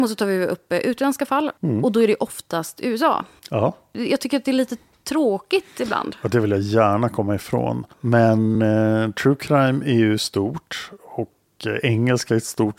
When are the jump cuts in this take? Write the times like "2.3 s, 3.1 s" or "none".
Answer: none